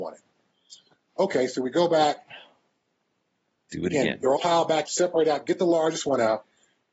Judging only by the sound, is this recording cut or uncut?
cut